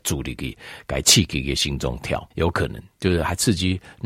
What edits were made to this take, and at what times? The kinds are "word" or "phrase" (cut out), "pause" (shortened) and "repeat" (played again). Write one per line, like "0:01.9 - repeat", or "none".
0:02.3 - pause